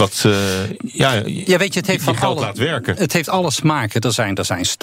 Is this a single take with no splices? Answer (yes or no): yes